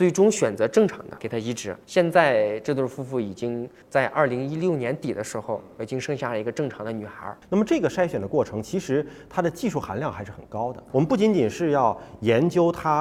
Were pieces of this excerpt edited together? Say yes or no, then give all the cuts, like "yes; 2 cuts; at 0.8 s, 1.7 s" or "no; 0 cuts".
yes; 1 cut; at 1.8 s